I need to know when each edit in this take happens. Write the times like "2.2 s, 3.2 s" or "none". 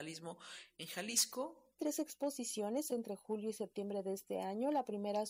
1.8 s, 2.9 s